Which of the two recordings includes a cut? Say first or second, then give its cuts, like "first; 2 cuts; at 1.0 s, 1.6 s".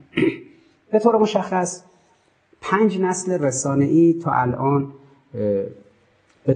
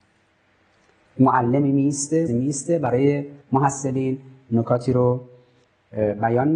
second; 2 cuts; at 2.3 s, 3.4 s